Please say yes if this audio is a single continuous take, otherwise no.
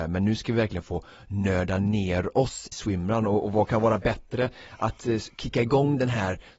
no